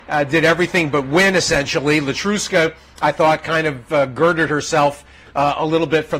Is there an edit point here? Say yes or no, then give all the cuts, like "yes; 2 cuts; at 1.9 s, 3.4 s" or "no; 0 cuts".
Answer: no; 0 cuts